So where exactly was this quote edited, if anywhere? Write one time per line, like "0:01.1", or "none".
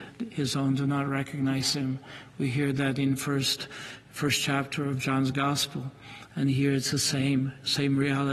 none